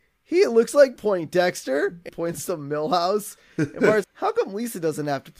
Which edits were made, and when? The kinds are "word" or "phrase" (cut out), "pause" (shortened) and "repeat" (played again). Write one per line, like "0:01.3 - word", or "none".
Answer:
0:01.0 - word
0:02.1 - word
0:04.0 - word